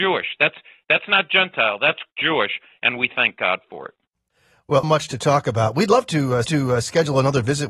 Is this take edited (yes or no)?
yes